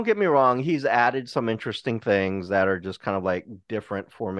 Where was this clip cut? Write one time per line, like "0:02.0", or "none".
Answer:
none